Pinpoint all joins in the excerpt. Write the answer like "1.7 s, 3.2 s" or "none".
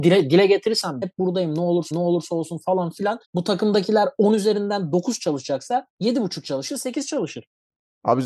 1.0 s, 1.9 s, 3.2 s, 5.9 s